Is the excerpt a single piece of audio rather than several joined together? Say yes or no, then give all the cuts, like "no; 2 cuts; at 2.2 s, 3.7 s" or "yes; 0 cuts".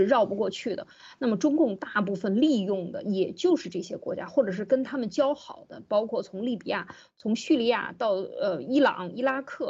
yes; 0 cuts